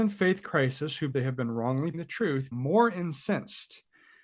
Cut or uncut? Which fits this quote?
cut